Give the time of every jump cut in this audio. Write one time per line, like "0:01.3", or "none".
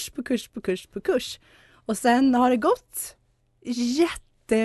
none

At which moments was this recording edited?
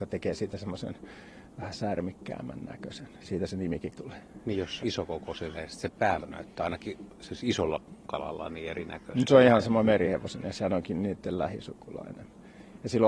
0:03.9
0:04.8
0:05.5
0:06.2
0:10.4

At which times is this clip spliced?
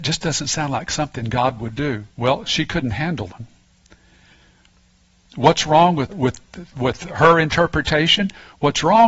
0:02.1
0:03.3
0:06.1
0:06.7

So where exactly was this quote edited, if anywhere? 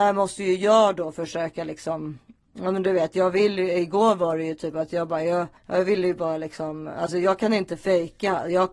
0:05.6

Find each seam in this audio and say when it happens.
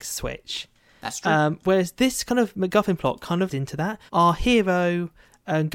0:03.5
0:04.1

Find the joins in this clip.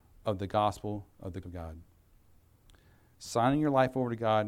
0:01.4

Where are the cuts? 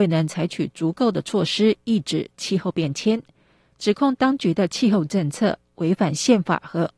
none

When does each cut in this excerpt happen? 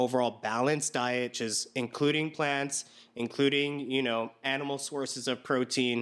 0:01.3

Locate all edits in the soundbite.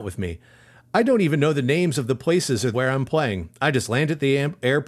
0:02.7

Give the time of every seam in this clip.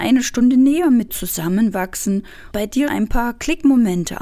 0:01.1
0:02.5
0:02.9

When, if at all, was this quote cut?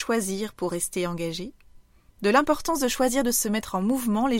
none

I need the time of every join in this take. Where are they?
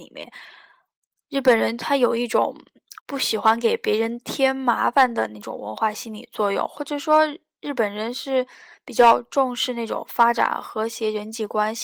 0:03.0

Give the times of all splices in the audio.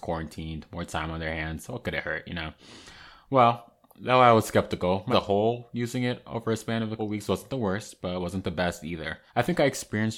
0:05.1
0:07.0
0:09.3

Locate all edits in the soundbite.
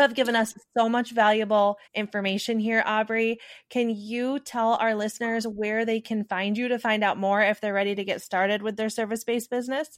0:01.9

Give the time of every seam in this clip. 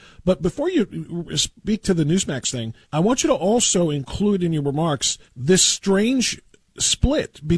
0:02.8
0:05.3

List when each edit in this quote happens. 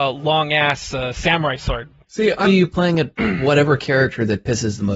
0:02.0
0:02.4

